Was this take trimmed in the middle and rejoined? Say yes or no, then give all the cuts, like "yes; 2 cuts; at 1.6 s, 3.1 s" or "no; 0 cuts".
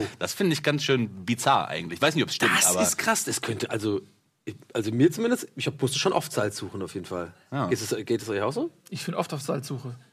no; 0 cuts